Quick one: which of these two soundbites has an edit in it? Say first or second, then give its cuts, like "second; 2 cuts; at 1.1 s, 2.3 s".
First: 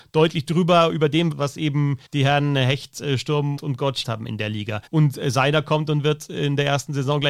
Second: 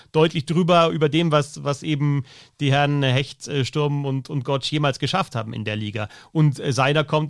first; 5 cuts; at 1.3 s, 2.1 s, 3.6 s, 4.0 s, 4.9 s